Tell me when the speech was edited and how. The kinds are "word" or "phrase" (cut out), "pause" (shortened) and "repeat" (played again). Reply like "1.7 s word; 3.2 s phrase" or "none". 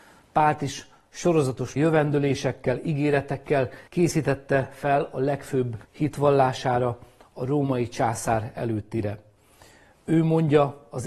1.8 s word; 3.9 s pause; 5.8 s pause